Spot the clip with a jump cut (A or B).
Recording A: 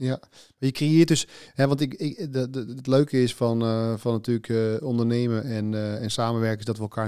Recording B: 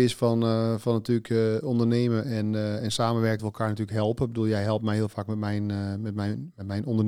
B